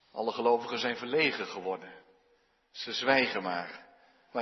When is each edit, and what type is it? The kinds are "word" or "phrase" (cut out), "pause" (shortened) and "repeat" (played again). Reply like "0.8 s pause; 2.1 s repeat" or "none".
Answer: none